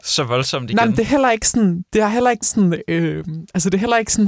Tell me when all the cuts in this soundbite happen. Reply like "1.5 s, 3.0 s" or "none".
2.4 s